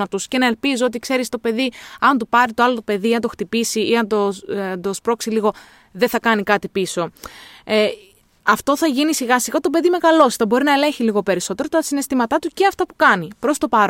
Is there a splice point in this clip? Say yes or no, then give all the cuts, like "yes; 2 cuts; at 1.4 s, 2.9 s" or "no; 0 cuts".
no; 0 cuts